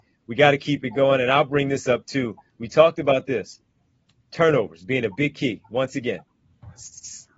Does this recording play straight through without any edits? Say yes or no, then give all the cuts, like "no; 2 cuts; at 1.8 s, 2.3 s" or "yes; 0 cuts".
yes; 0 cuts